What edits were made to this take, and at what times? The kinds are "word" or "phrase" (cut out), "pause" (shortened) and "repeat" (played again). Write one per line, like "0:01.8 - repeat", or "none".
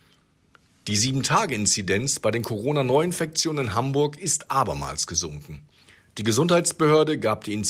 none